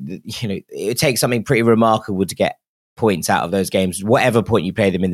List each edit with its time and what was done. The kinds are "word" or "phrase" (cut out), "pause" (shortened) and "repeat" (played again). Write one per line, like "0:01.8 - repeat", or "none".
none